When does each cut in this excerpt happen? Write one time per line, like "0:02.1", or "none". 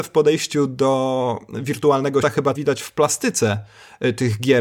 0:02.2
0:02.5